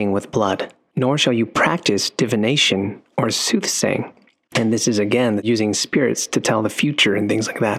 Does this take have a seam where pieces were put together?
no; 0 cuts

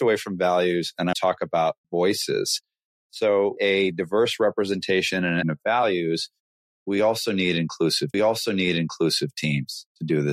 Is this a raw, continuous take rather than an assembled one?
no; 5 cuts; at 1.1 s, 1.8 s, 3.6 s, 5.4 s, 8.1 s

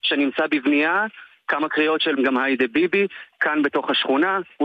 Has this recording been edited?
yes; 1 cut; at 2.2 s

